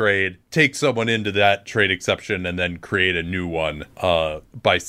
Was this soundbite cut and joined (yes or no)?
no